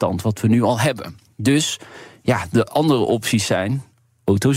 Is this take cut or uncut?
uncut